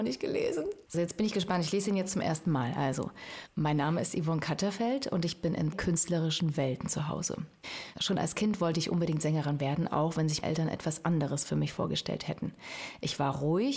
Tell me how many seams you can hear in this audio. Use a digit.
3